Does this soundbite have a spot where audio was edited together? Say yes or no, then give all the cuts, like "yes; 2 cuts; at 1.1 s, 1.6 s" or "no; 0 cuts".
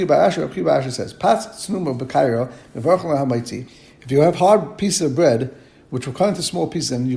no; 0 cuts